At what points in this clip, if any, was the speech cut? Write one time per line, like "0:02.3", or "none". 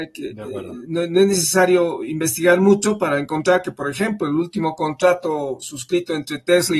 none